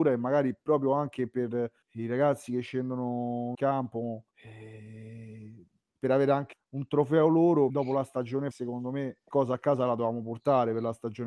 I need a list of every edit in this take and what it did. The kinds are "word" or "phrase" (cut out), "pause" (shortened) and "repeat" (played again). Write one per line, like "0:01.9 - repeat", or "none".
0:01.8 - pause
0:03.5 - word
0:04.3 - pause
0:06.5 - word
0:07.7 - word
0:08.5 - word
0:09.3 - word